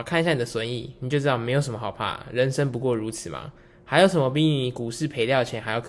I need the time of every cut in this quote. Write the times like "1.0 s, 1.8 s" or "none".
none